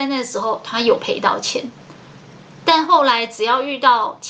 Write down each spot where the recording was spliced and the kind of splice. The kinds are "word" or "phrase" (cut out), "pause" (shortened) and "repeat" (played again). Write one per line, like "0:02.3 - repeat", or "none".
none

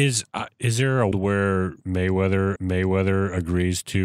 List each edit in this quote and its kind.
0:01.1 - word
0:02.6 - repeat

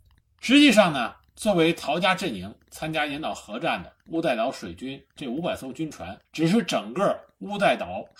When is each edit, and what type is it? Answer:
0:06.2 - pause

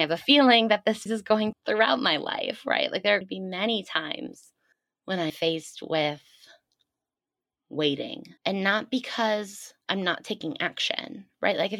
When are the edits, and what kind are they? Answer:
0:01.1 - word
0:01.5 - phrase
0:03.2 - word
0:04.7 - pause
0:05.3 - word
0:08.4 - pause
0:09.8 - pause

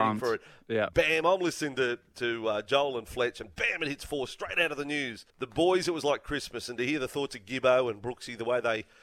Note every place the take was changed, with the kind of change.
0:05.3 - pause

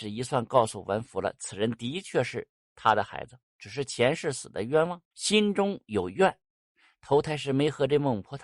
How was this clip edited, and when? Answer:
0:03.5 - pause
0:05.1 - pause

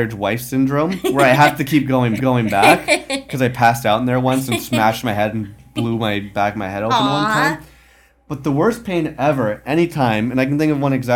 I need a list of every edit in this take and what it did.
0:02.2 - repeat

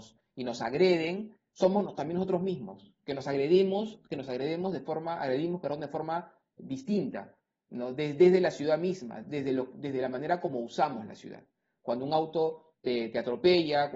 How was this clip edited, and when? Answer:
none

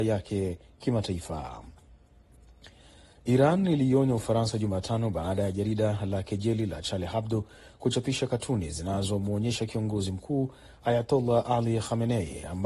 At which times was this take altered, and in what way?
none

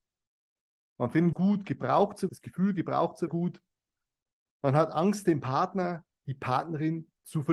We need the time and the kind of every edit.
0:01.3 - word
0:02.3 - word
0:03.3 - phrase

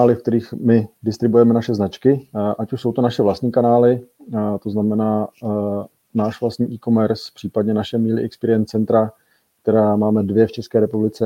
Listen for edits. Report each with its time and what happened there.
none

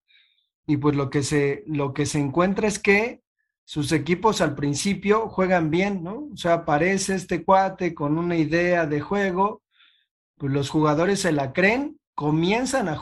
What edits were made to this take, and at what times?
none

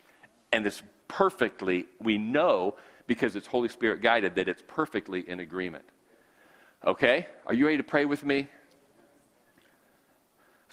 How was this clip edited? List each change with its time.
none

